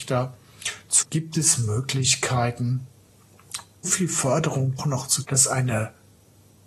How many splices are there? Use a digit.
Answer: 4